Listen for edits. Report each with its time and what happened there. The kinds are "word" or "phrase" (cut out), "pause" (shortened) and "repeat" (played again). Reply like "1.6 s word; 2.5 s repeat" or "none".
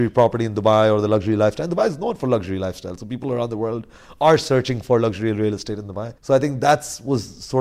6.2 s pause